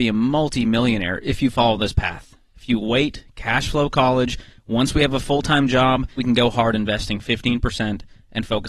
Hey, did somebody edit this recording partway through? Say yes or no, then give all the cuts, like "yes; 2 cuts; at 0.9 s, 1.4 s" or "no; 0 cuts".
yes; 1 cut; at 6.2 s